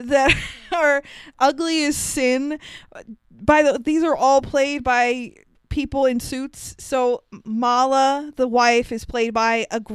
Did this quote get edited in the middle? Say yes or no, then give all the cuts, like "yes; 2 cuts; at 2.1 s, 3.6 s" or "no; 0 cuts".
no; 0 cuts